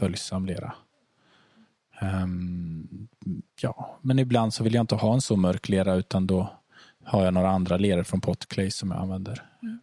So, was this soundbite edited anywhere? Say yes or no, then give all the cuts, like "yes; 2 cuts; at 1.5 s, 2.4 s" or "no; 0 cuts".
yes; 1 cut; at 3.5 s